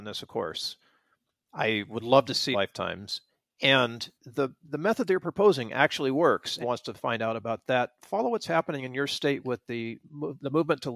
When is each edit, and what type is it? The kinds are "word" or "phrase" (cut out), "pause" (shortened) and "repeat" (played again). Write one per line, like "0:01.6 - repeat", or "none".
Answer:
0:02.5 - phrase
0:04.2 - pause
0:06.6 - phrase